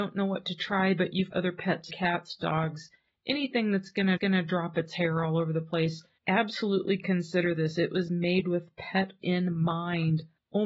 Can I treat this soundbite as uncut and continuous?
no; 4 cuts; at 1.3 s, 1.9 s, 4.2 s, 9.2 s

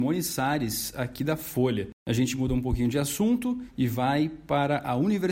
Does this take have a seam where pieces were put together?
no; 0 cuts

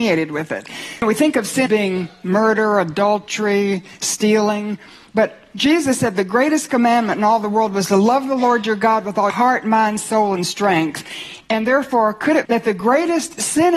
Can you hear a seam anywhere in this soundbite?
yes; 3 cuts; at 1.7 s, 9.3 s, 12.4 s

